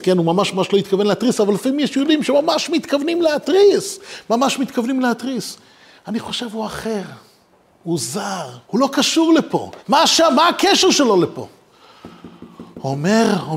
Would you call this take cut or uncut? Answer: cut